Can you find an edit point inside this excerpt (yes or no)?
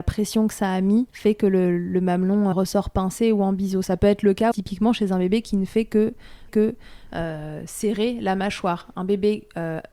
yes